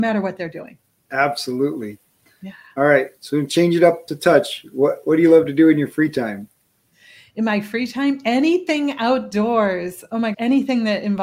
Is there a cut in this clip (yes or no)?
yes